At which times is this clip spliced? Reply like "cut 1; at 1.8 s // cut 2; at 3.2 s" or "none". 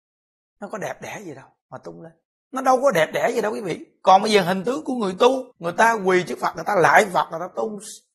cut 1; at 2.3 s // cut 2; at 5.5 s